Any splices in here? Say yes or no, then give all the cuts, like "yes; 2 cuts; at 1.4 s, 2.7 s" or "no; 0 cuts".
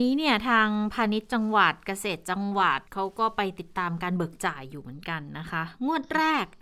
yes; 1 cut; at 2.9 s